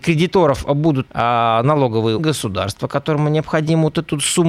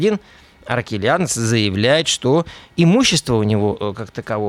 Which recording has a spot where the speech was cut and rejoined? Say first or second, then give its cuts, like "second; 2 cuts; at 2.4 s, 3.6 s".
first; 2 cuts; at 1.1 s, 2.2 s